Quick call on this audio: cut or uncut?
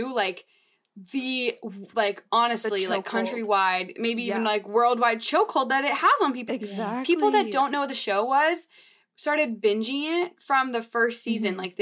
cut